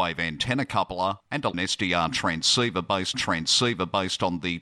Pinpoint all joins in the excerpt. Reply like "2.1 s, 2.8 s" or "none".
1.2 s, 1.5 s, 3.1 s